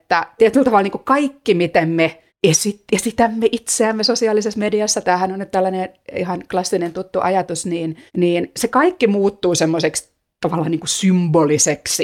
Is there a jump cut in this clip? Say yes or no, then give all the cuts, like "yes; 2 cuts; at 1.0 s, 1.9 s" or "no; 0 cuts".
yes; 2 cuts; at 2.3 s, 8.1 s